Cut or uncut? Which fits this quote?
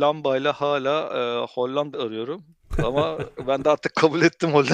cut